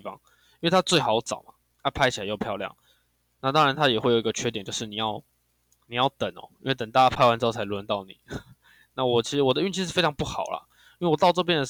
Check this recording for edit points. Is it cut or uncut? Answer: uncut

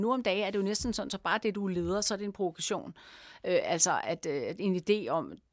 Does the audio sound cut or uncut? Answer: uncut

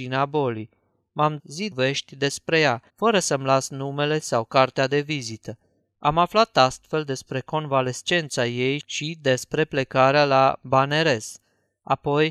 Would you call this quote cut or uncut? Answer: cut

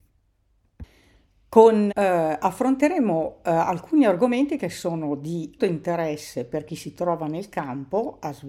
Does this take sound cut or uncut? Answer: cut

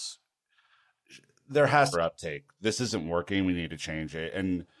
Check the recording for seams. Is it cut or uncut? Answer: cut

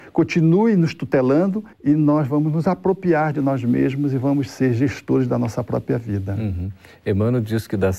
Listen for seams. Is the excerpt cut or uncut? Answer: cut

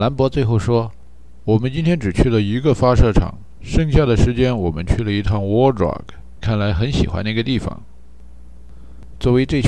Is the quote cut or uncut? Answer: cut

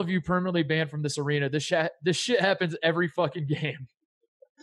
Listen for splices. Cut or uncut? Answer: uncut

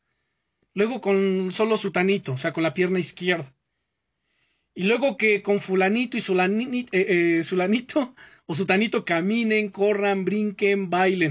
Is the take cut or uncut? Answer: uncut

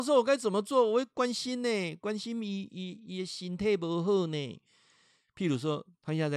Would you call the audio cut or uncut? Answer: uncut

